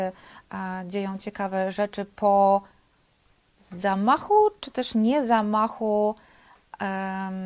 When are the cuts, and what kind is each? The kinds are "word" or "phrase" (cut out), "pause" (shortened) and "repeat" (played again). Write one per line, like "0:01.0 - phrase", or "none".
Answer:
none